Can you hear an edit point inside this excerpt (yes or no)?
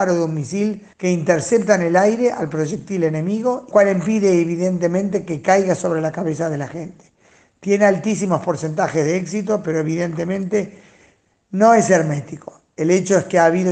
yes